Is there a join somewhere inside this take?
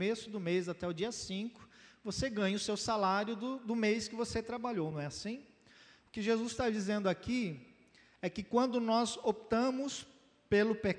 no; 0 cuts

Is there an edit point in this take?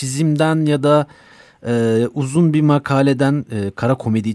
no; 0 cuts

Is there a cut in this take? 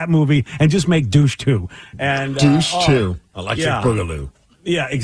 no; 0 cuts

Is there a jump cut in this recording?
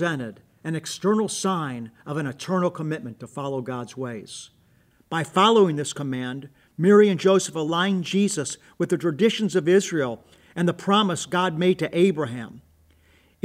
no; 0 cuts

